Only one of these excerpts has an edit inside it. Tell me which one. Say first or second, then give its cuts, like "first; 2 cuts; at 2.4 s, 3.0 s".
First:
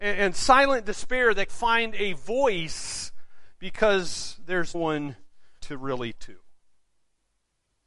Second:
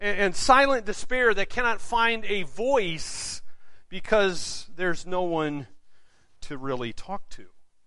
first; 4 cuts; at 1.5 s, 4.7 s, 5.6 s, 6.1 s